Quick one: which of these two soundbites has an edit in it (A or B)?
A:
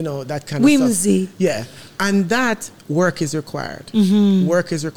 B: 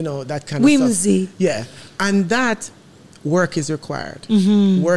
A